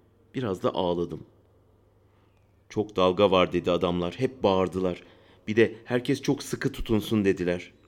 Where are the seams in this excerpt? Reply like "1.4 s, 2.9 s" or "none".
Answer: none